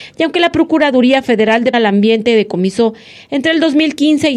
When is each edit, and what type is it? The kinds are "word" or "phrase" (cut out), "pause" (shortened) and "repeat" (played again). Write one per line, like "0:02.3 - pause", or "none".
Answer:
0:01.7 - word